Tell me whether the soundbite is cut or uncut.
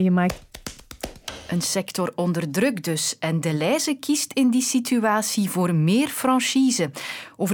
uncut